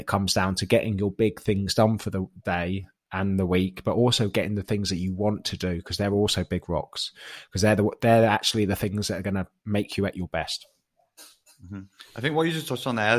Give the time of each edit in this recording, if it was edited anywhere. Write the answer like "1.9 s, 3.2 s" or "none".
9.6 s